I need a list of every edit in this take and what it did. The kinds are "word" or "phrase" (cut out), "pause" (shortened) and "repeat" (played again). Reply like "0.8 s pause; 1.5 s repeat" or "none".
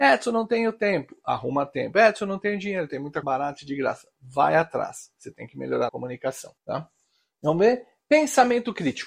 3.2 s word; 5.9 s phrase; 6.6 s pause

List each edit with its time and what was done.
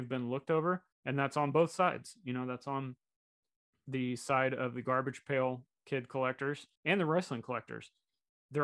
0.9 s pause; 6.7 s pause

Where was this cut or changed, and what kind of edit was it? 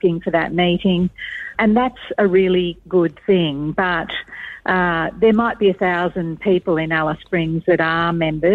1.5 s word

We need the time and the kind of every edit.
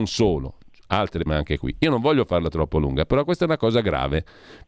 1.3 s word

